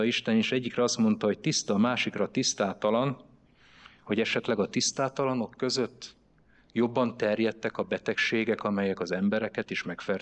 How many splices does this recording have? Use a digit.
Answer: 0